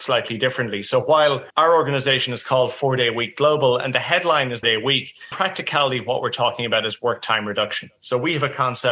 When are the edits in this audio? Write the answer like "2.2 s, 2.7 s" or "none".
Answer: 1.5 s, 4.6 s, 5.3 s